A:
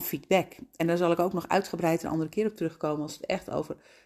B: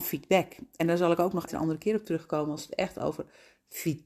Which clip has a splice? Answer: B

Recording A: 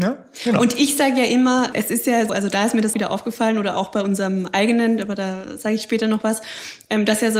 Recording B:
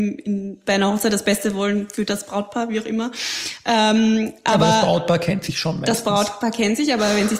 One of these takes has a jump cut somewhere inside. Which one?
A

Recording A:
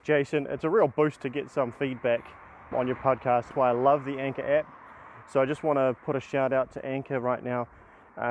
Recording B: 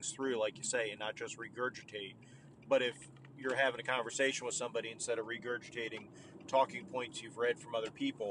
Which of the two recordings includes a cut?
A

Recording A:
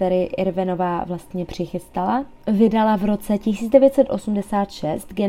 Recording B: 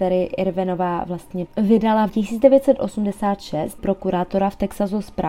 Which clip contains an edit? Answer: B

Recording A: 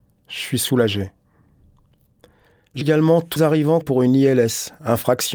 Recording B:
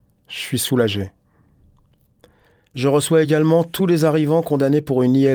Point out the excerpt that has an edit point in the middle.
A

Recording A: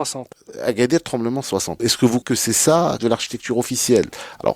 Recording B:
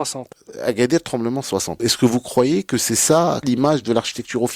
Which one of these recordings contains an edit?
A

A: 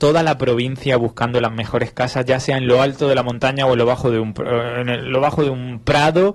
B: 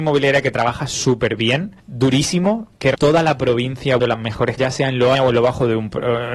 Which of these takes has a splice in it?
B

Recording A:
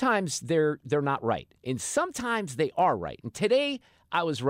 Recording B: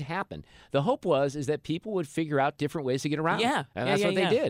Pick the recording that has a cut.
A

